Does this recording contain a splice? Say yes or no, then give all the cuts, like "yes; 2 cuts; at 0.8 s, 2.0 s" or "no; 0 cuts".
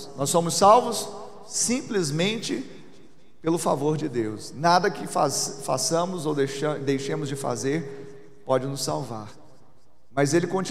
no; 0 cuts